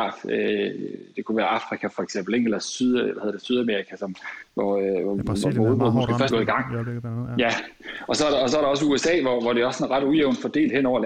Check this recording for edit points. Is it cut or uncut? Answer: cut